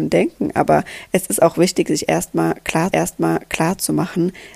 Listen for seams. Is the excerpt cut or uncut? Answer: cut